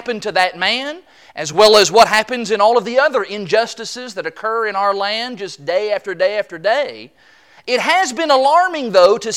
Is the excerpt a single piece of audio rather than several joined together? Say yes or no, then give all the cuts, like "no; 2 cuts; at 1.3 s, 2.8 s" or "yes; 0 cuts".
yes; 0 cuts